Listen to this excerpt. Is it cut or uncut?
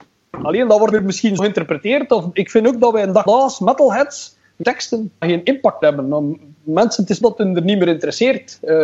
cut